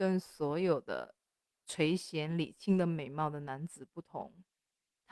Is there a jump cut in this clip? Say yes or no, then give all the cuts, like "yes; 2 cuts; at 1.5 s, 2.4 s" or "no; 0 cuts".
no; 0 cuts